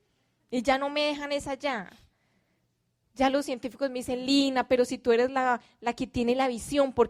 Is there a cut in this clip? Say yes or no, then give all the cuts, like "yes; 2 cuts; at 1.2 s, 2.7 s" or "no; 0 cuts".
no; 0 cuts